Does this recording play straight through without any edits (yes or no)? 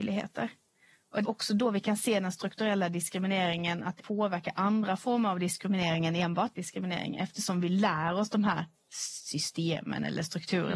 no